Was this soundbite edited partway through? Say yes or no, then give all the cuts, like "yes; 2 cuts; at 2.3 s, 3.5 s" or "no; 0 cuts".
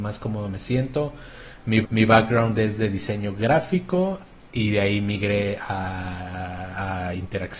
yes; 1 cut; at 1.8 s